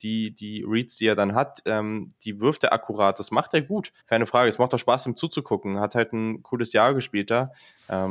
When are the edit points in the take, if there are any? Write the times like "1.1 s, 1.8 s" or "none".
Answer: 4.0 s